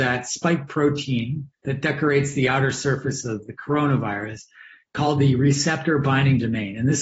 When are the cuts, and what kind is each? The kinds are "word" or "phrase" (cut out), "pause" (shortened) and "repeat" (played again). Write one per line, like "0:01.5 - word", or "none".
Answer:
0:01.5 - pause